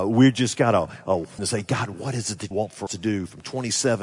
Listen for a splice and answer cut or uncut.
cut